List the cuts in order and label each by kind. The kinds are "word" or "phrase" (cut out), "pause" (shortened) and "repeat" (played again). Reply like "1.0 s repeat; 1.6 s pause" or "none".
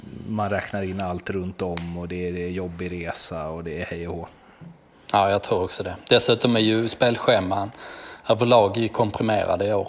none